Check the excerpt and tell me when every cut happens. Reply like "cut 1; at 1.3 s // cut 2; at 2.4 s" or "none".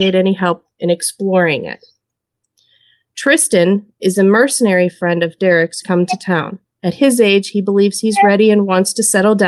cut 1; at 5.8 s